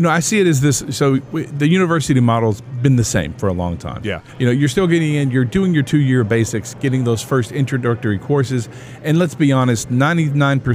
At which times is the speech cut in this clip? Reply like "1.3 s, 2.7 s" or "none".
none